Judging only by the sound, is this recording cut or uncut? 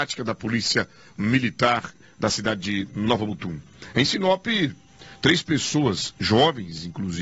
uncut